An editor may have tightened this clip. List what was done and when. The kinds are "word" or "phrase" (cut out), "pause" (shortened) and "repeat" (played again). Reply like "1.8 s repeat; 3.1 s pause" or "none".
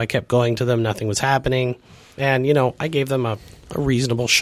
none